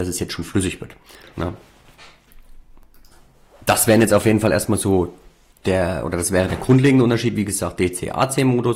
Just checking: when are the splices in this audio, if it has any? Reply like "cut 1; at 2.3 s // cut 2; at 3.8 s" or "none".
none